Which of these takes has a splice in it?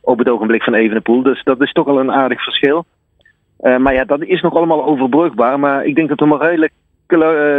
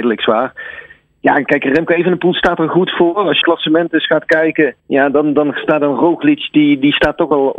second; 2 cuts; at 3.4 s, 4.8 s

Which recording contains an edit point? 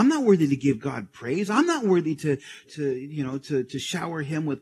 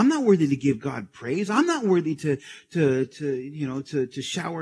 first; 1 cut; at 2.6 s

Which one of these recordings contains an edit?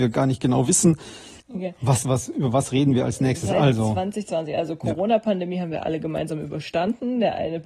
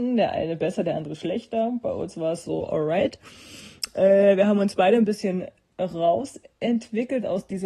first; 2 cuts; at 1.4 s, 2.0 s

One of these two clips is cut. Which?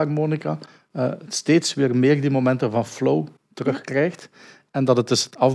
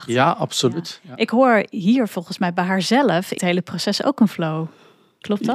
second; 1 cut; at 3.4 s

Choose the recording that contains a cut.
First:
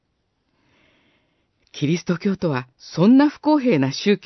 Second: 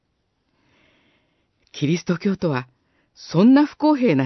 first; 1 cut; at 2.7 s

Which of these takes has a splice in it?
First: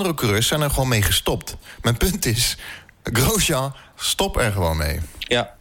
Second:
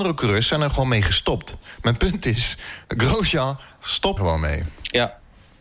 second; 2 cuts; at 2.8 s, 4.2 s

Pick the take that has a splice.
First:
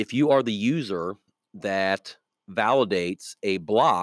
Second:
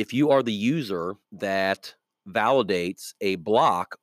second; 1 cut; at 1.2 s

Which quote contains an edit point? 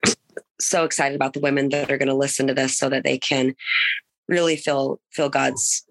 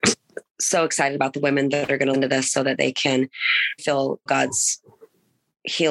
second; 3 cuts; at 2.1 s, 3.8 s, 4.3 s

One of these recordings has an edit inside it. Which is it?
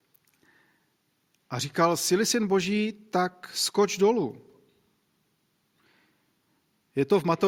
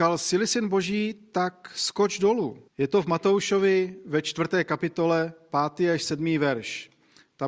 second; 1 cut; at 2.7 s

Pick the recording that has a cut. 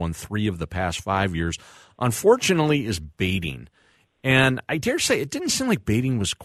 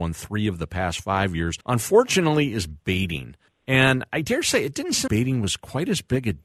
second; 3 cuts; at 1.6 s, 3.5 s, 5.1 s

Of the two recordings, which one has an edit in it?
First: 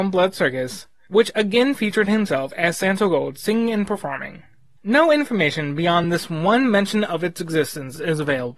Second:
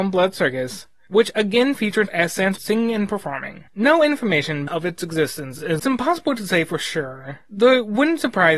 second; 5 cuts; at 2.1 s, 2.6 s, 3.7 s, 4.7 s, 5.8 s

